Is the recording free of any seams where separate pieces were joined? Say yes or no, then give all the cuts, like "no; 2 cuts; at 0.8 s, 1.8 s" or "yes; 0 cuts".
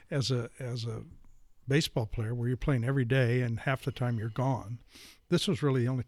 yes; 0 cuts